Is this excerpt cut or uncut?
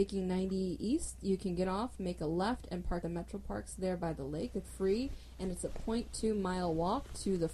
cut